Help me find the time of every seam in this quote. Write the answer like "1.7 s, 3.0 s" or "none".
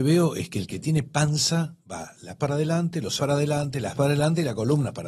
1.8 s, 2.4 s, 3.2 s, 3.9 s